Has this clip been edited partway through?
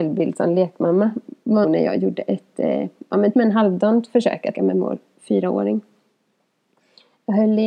yes; 3 cuts; at 1.6 s, 3.3 s, 4.5 s

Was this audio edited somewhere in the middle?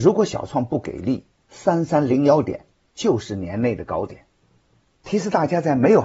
yes; 1 cut; at 1.4 s

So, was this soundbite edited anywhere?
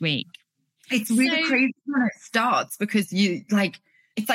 no; 0 cuts

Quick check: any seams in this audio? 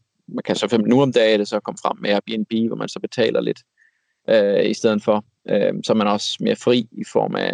no; 0 cuts

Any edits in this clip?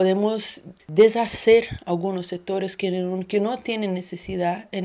no; 0 cuts

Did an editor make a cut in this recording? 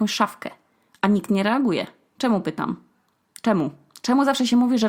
no; 0 cuts

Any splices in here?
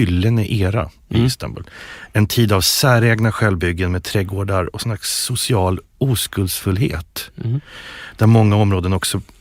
no; 0 cuts

